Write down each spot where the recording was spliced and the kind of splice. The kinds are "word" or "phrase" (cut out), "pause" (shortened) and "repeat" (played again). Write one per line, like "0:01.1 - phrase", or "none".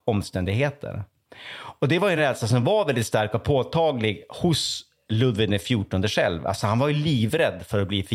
none